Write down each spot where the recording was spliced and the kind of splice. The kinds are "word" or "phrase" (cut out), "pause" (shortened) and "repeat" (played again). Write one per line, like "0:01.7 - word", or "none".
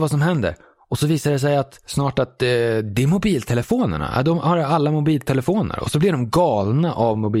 none